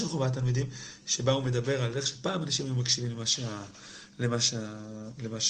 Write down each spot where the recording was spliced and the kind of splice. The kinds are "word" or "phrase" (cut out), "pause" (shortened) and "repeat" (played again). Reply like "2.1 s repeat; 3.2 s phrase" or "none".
none